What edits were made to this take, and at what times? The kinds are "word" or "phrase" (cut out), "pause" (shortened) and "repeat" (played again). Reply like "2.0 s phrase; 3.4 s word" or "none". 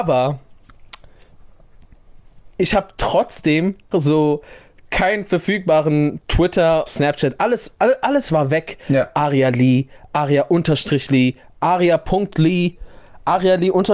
3.9 s word; 6.9 s phrase

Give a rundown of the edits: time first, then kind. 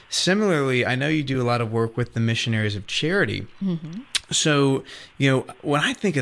none

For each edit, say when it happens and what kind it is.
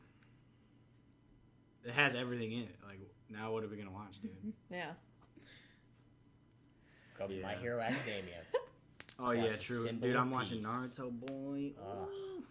7.3 s word

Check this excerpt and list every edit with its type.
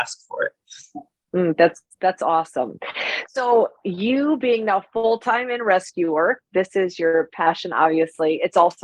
none

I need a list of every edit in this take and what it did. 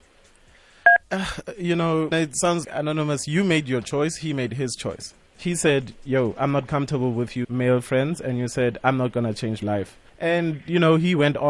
1.0 s pause; 2.1 s word; 2.6 s word; 7.4 s word; 9.6 s word; 10.1 s pause

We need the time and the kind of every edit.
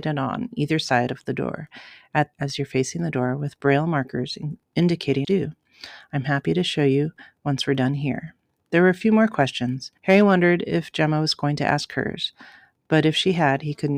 2.3 s phrase; 5.2 s phrase; 10.0 s pause

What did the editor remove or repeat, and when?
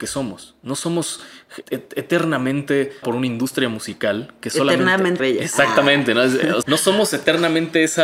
1.6 s word; 3.0 s phrase; 5.2 s word; 6.6 s phrase

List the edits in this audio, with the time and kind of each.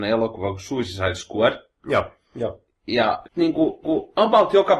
3.2 s word; 3.8 s repeat

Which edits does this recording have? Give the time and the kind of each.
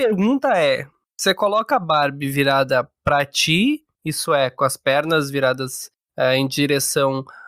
none

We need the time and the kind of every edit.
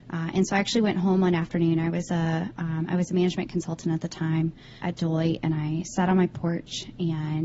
4.8 s word

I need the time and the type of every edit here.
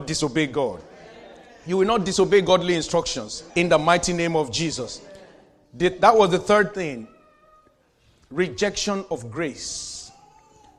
3.5 s pause

